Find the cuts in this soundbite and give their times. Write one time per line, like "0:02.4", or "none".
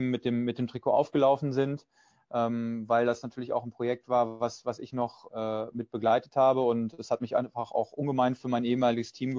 0:05.3